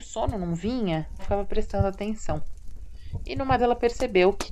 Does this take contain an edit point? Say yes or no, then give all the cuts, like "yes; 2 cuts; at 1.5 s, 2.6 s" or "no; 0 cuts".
yes; 2 cuts; at 1.2 s, 3.6 s